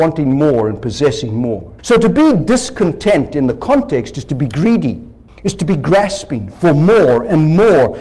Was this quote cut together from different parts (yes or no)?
yes